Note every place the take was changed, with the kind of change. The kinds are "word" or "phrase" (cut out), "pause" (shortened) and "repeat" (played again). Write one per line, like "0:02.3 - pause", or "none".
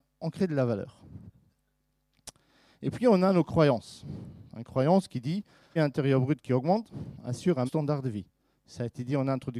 0:05.8 - phrase
0:07.7 - word